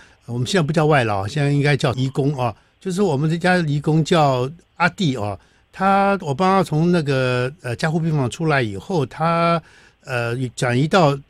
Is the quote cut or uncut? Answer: uncut